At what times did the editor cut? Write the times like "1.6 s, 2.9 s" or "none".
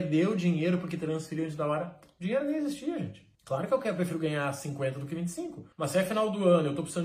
3.3 s, 5.7 s